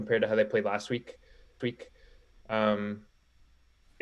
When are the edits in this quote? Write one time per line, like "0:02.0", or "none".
0:01.6